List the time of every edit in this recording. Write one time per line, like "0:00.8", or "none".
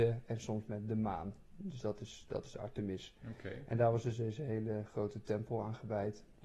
none